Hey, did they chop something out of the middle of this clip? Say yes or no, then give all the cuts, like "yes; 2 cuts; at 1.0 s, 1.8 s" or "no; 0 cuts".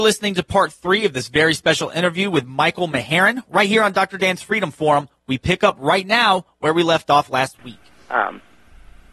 no; 0 cuts